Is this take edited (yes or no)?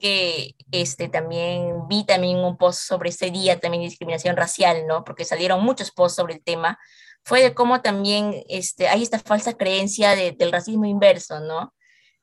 no